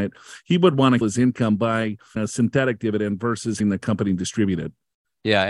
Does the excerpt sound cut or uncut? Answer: cut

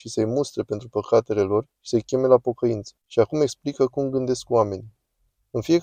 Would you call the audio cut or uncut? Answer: cut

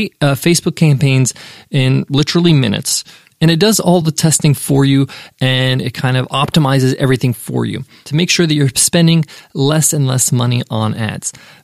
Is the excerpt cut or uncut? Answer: uncut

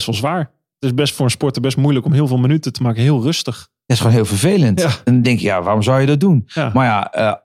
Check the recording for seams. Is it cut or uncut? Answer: uncut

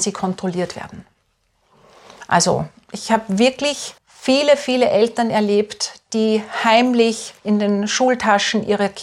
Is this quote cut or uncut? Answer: cut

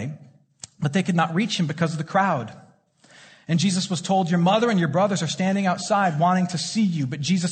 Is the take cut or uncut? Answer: uncut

